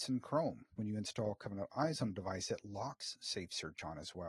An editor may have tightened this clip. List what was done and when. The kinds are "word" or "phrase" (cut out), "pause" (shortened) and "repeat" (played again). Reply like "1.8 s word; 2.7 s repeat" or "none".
none